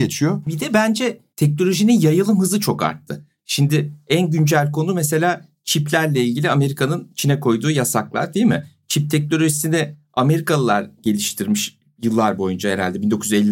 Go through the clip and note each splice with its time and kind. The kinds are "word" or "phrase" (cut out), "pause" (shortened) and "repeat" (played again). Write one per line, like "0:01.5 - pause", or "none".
0:01.3 - pause